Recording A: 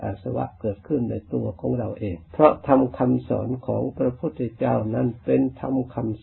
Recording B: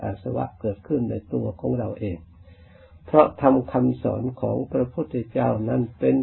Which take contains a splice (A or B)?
A